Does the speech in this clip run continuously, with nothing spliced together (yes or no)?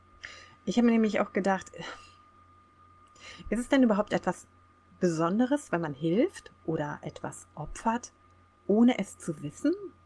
yes